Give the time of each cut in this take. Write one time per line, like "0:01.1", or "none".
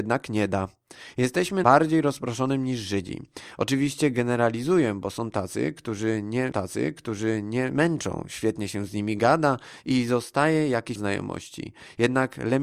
0:01.6
0:06.5
0:11.0

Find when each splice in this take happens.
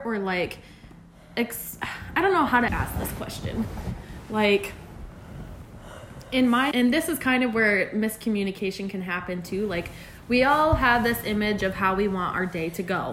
0:02.7
0:06.7

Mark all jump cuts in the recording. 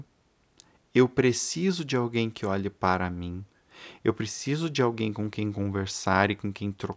none

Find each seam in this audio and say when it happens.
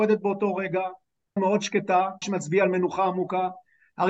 0:01.4
0:02.2

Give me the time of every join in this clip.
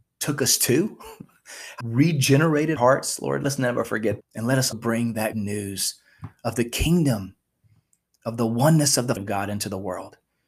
0:01.8
0:02.8
0:03.4
0:04.2
0:04.7
0:05.3
0:09.2

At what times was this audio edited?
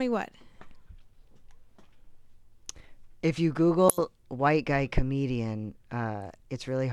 0:04.2

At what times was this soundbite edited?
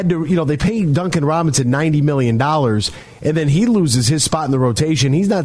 none

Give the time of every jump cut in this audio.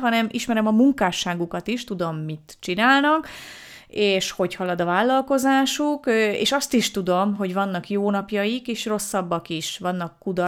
none

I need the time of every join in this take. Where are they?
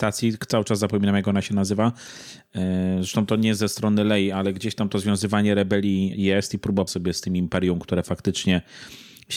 0:06.1
0:06.9

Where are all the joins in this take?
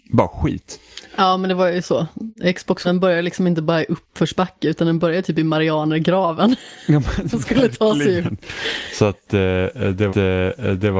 0:02.8
0:10.1

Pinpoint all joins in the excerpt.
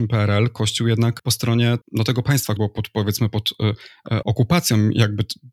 0:01.2
0:01.8
0:02.6
0:04.2

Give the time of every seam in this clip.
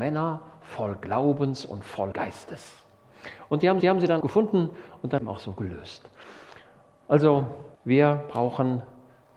0:02.1
0:03.8
0:04.2
0:05.2
0:07.7

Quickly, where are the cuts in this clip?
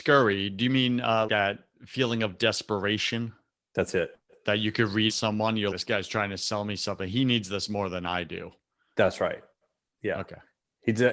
0:01.3
0:05.1
0:05.7

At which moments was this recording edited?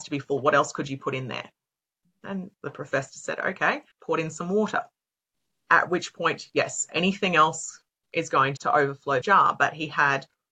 0:02.5
0:03.9
0:05.3
0:07.9
0:08.6
0:09.2

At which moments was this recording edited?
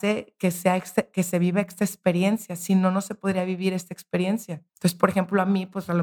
0:04.7

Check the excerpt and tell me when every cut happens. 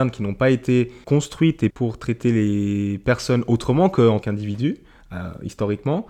0:01.0
0:01.7
0:04.2

